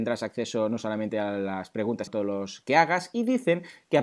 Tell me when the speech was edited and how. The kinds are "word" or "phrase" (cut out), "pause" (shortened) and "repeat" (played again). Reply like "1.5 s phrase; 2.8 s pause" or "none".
2.1 s word